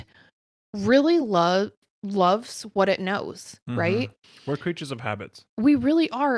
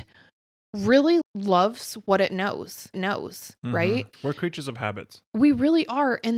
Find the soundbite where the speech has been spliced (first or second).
second